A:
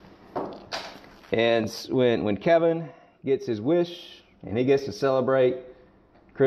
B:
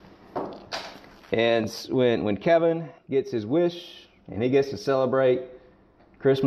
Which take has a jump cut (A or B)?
B